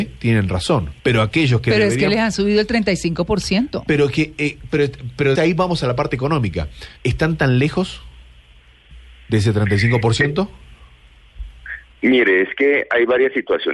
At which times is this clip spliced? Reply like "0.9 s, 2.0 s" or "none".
1.0 s, 5.4 s, 7.0 s